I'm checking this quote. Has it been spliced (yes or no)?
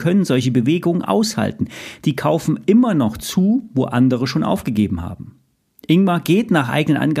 no